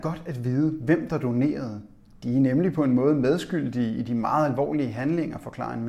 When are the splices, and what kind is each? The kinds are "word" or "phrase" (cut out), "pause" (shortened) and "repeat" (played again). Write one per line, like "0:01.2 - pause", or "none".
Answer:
none